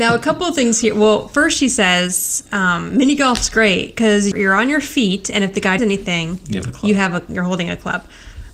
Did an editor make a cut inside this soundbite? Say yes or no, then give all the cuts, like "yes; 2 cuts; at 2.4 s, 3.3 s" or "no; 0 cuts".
yes; 3 cuts; at 2.5 s, 4.3 s, 5.8 s